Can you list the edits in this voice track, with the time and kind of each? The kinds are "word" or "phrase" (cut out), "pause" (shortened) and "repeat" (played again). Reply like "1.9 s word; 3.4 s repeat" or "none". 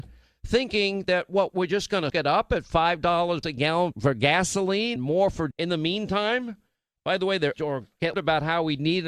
1.5 s word; 2.1 s word; 3.4 s word; 3.9 s word; 5.0 s word; 5.5 s word; 7.5 s word; 8.1 s word